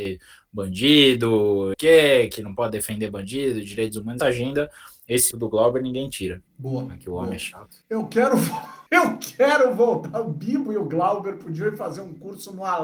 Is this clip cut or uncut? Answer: cut